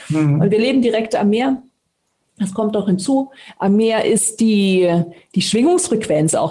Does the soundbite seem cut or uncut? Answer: uncut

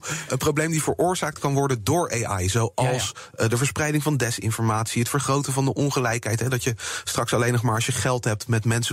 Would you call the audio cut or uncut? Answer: uncut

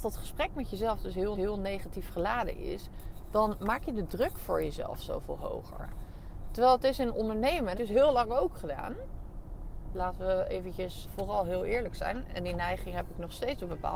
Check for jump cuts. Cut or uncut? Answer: cut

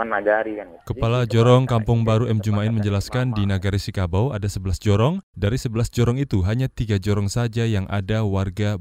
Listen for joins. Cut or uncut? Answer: uncut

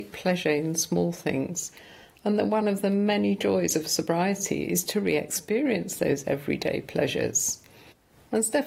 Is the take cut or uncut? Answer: uncut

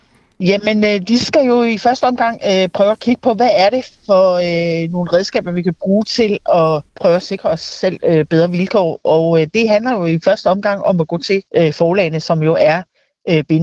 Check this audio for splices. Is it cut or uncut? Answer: cut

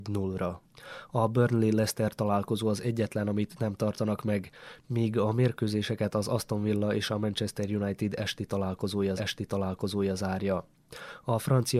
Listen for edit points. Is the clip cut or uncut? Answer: cut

